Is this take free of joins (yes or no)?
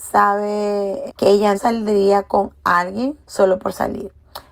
no